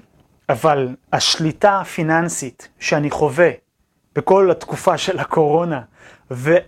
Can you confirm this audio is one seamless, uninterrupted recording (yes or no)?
yes